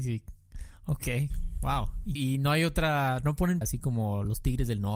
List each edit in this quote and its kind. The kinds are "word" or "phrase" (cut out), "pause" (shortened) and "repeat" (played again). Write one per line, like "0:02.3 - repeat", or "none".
0:02.2 - word
0:03.6 - phrase

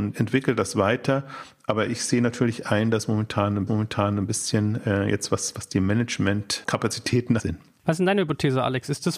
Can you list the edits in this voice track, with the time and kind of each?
0:03.7 - repeat
0:07.4 - phrase

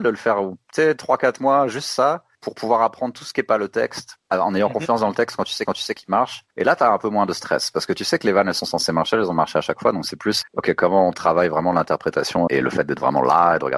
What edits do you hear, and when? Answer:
0:05.7 - repeat
0:10.4 - word
0:12.5 - word

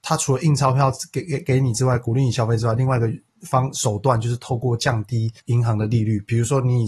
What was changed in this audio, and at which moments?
0:05.4 - pause

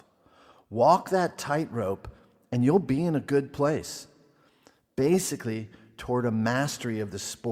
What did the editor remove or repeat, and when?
none

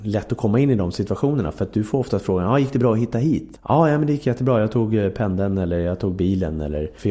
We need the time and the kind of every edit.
none

